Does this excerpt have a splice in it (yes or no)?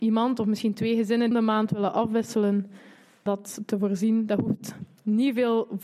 yes